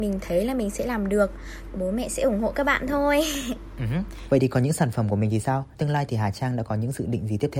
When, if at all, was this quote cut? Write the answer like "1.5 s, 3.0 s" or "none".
5.8 s